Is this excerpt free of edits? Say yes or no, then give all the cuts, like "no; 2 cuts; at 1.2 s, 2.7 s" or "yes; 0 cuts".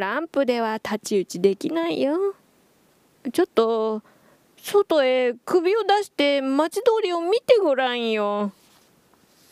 yes; 0 cuts